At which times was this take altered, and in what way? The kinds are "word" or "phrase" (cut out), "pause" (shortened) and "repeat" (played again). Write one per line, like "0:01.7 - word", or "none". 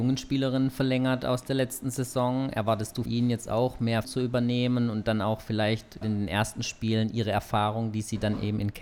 0:03.1 - word
0:04.0 - word
0:06.0 - word